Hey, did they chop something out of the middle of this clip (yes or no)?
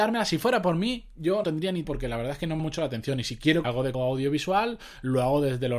yes